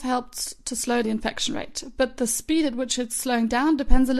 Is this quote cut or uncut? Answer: cut